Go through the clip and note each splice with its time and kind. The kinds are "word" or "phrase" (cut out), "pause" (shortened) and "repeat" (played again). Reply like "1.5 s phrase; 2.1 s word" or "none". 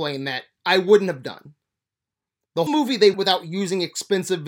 2.7 s word; 3.1 s word